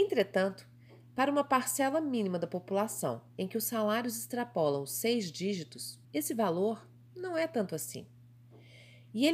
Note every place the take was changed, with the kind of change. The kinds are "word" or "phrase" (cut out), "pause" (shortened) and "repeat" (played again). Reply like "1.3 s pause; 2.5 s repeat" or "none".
6.0 s pause